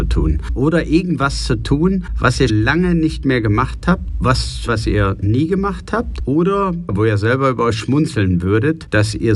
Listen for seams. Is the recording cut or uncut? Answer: cut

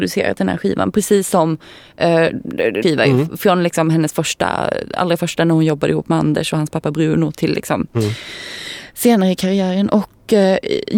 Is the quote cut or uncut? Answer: cut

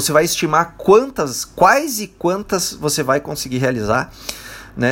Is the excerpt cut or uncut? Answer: uncut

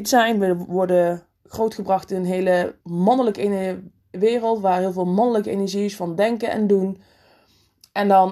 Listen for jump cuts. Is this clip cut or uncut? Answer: cut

